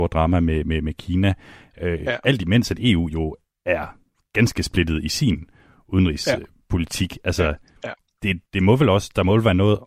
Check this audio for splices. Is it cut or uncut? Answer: cut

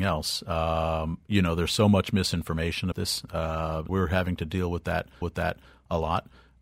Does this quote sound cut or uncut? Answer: cut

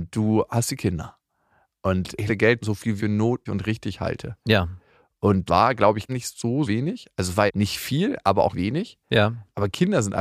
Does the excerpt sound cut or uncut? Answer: cut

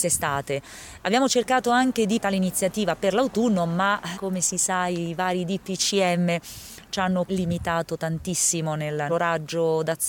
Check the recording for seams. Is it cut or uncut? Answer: cut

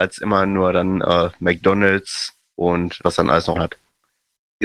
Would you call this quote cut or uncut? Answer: cut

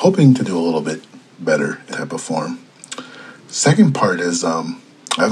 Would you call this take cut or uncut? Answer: cut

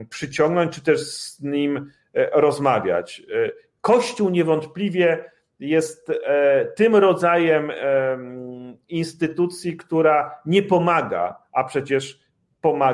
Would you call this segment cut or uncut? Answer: uncut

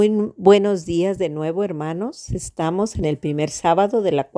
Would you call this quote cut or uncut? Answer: uncut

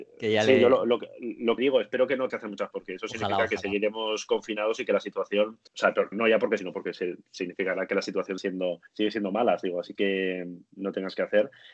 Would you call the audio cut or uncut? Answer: cut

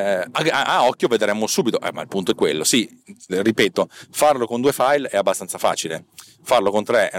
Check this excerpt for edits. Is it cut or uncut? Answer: cut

